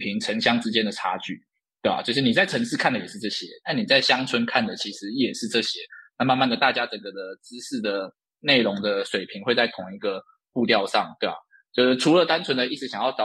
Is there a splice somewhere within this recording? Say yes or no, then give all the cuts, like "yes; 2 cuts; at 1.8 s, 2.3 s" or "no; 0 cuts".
no; 0 cuts